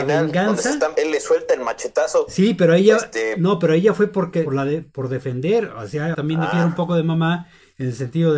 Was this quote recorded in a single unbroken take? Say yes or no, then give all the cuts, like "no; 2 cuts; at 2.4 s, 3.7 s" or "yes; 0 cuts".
no; 3 cuts; at 1.0 s, 4.5 s, 6.1 s